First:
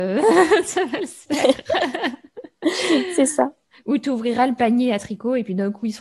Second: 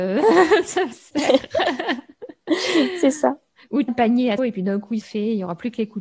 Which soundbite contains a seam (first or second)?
second